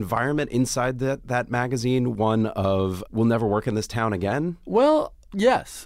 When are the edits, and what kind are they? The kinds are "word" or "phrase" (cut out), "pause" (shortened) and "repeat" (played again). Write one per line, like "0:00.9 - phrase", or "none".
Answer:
0:03.1 - word